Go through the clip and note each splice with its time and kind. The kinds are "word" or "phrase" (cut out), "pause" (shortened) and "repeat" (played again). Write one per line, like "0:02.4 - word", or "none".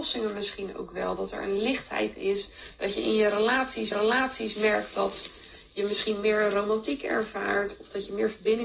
0:03.9 - repeat